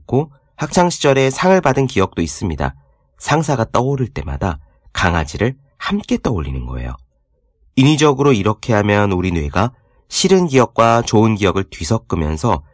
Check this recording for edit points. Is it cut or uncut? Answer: uncut